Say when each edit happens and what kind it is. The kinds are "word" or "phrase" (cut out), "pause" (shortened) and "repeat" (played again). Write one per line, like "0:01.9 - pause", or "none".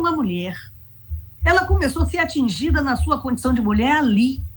0:01.3 - pause